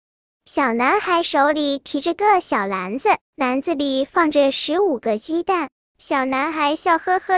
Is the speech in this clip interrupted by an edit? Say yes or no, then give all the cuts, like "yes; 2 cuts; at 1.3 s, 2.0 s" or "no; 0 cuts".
yes; 1 cut; at 5.8 s